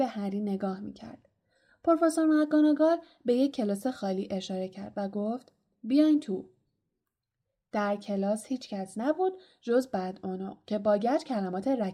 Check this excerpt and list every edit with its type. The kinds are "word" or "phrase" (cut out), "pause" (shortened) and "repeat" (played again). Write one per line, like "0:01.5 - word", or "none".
none

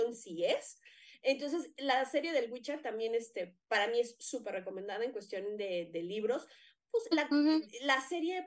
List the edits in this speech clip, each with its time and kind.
0:07.1 - word

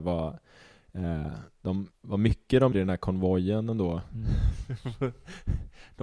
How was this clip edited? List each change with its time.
0:01.9 - pause
0:02.7 - word

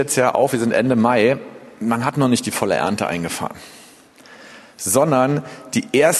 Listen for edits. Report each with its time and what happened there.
none

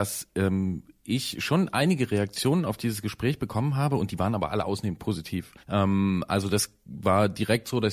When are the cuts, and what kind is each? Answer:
0:05.6 - pause

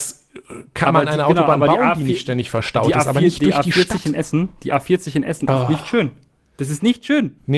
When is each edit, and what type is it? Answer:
none

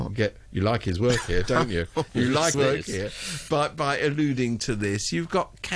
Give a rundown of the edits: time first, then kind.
0:02.5 - word

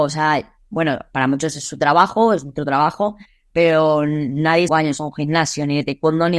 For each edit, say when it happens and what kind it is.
0:04.7 - phrase

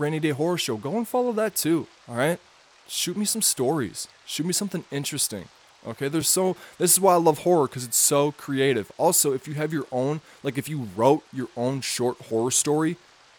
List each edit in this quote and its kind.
none

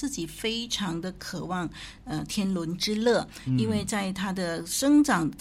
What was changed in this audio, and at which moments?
none

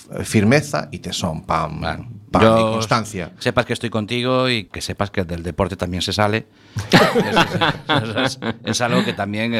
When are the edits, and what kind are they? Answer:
0:04.7 - word

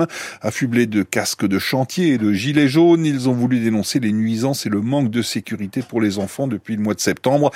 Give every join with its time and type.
none

